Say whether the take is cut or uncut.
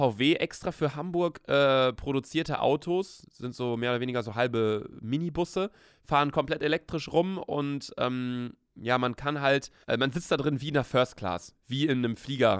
cut